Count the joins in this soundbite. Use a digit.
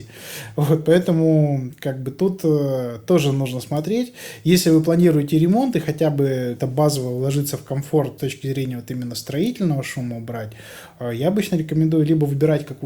2